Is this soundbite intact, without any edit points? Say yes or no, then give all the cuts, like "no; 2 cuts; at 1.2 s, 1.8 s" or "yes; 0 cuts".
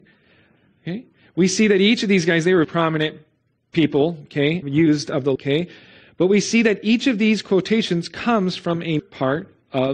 no; 4 cuts; at 2.6 s, 4.6 s, 5.4 s, 9.0 s